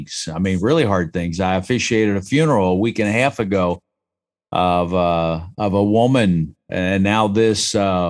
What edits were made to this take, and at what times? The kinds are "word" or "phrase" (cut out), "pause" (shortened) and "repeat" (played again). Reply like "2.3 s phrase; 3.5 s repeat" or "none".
none

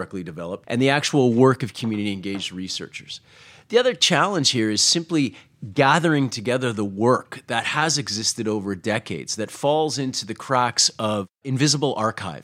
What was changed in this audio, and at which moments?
none

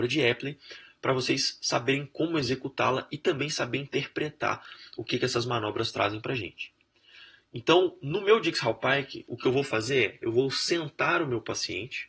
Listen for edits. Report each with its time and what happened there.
none

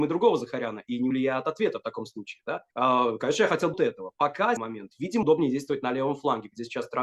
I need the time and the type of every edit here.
1.1 s word; 2.7 s pause; 3.7 s word; 4.6 s phrase; 5.2 s word

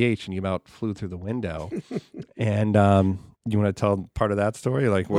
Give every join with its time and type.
3.3 s pause

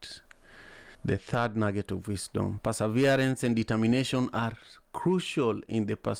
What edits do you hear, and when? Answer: 0.9 s pause

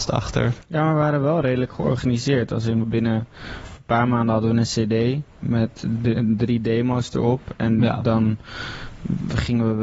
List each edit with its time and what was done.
2.8 s phrase

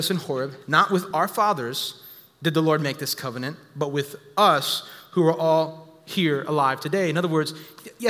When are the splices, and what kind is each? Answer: none

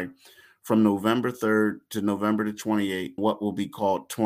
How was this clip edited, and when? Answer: 3.2 s word

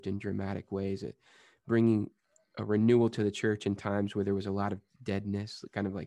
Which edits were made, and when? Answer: none

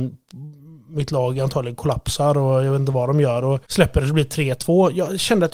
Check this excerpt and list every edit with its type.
3.7 s pause

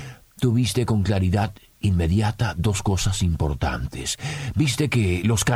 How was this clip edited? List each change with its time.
none

